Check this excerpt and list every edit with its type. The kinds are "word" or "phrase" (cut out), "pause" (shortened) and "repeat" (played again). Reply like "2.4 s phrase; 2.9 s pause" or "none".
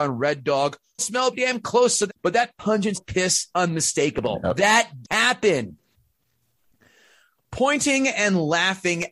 1.0 s word; 1.3 s word; 2.1 s word; 2.9 s word; 3.5 s word; 5.0 s word